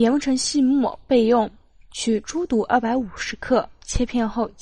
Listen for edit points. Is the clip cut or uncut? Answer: uncut